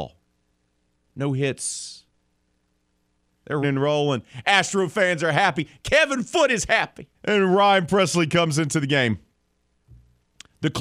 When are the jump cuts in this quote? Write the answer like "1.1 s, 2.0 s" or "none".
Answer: 3.6 s, 7.1 s